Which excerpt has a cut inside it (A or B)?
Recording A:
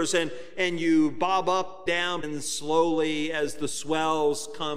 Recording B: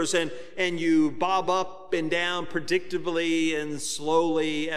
A